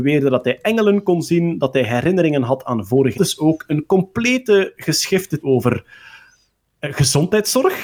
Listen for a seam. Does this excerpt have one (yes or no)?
yes